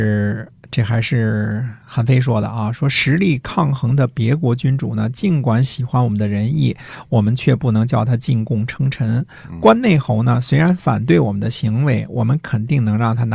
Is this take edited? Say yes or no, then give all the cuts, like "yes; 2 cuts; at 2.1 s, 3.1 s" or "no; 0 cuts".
yes; 1 cut; at 1.8 s